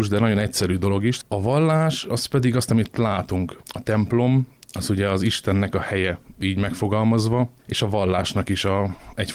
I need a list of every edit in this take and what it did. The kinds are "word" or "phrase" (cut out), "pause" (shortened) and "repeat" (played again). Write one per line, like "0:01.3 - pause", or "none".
0:07.6 - pause